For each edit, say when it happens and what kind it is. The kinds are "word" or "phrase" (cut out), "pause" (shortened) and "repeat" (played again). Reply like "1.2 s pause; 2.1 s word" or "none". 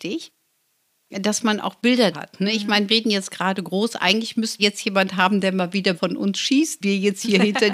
2.1 s word; 2.9 s word; 4.6 s word; 5.9 s word; 6.8 s word